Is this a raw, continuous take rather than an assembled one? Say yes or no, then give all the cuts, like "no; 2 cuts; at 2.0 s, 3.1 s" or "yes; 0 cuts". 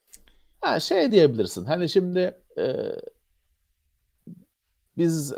no; 1 cut; at 2.5 s